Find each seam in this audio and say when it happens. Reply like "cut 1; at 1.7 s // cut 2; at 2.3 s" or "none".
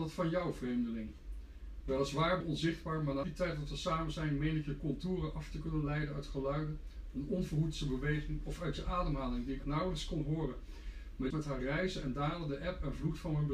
cut 1; at 2.4 s // cut 2; at 3.2 s // cut 3; at 9.6 s // cut 4; at 11.3 s